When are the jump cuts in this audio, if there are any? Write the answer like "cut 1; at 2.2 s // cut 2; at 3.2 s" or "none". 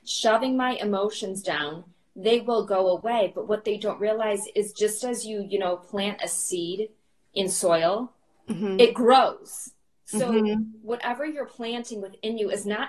none